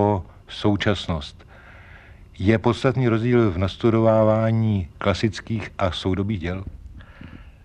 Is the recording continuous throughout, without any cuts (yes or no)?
no